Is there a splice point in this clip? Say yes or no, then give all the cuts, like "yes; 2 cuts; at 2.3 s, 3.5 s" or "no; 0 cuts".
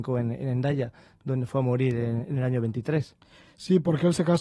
no; 0 cuts